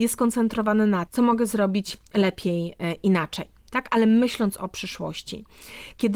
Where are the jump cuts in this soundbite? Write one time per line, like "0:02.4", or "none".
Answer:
0:01.1